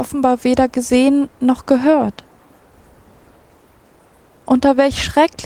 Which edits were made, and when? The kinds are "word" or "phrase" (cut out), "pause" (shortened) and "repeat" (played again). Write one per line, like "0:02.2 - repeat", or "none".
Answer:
none

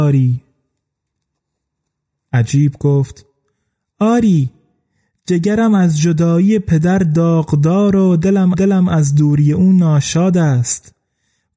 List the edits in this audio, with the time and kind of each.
0:08.5 - repeat

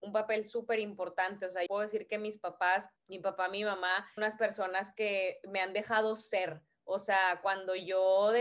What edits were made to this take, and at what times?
0:01.7 - word
0:03.0 - pause
0:04.2 - phrase

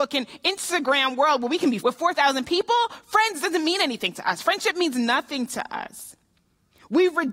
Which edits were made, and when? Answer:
0:01.8 - word

